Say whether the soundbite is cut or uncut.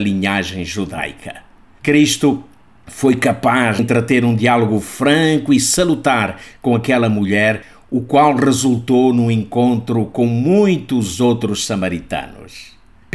cut